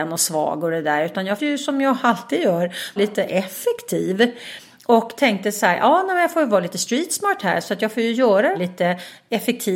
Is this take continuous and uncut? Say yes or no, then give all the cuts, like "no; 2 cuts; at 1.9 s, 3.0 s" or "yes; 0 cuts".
no; 3 cuts; at 1.4 s, 3.0 s, 8.5 s